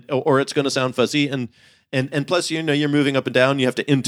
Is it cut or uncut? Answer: uncut